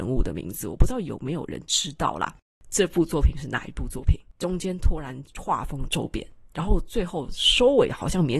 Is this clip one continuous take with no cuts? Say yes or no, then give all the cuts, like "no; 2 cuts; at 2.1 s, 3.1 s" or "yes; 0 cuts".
yes; 0 cuts